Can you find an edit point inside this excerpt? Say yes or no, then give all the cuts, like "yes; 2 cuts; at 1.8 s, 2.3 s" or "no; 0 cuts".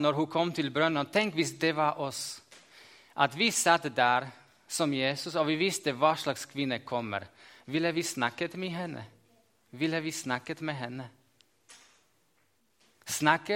no; 0 cuts